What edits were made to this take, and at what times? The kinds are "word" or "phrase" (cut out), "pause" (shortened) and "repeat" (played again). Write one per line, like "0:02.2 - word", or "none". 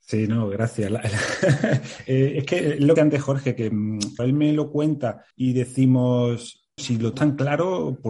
0:03.0 - word
0:04.2 - word
0:05.3 - pause
0:06.8 - word
0:07.1 - word